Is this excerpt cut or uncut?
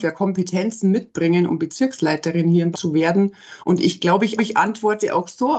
cut